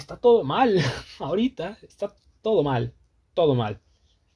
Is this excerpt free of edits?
yes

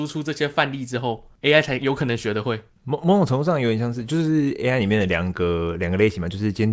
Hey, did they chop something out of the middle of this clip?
no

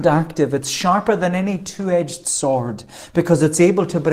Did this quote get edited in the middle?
no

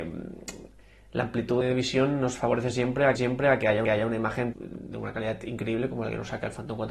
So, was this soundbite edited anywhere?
yes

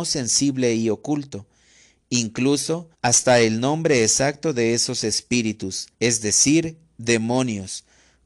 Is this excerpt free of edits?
no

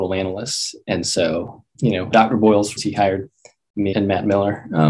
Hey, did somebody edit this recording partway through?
yes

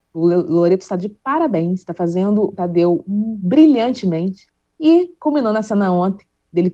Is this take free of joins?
no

